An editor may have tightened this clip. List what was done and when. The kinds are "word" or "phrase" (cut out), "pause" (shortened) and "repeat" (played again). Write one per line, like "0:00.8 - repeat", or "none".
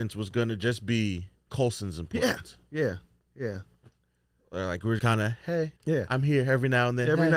0:01.5 - word
0:05.0 - word
0:05.8 - pause